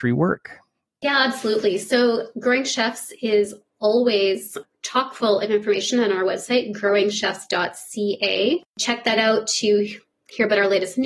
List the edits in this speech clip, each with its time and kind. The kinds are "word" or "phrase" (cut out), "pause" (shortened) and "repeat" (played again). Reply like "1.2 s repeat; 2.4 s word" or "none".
none